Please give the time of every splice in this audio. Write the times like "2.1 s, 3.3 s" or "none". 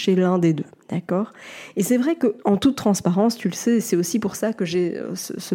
2.4 s